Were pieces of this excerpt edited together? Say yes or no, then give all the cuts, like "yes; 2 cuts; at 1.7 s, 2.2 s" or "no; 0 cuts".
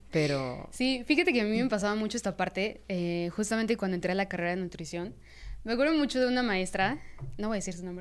no; 0 cuts